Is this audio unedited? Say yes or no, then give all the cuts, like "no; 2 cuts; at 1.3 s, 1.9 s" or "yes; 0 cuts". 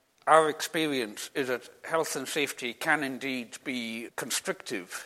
no; 1 cut; at 4.1 s